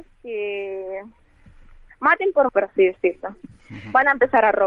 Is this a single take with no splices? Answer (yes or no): no